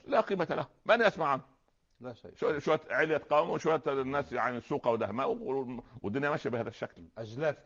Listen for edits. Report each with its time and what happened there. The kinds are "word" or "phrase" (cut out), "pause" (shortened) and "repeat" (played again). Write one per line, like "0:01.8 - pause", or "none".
none